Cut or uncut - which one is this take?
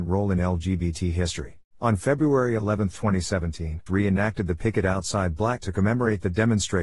cut